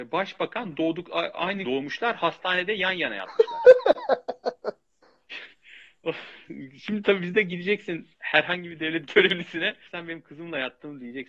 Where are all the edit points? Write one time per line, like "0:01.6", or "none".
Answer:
0:01.6
0:08.1
0:09.9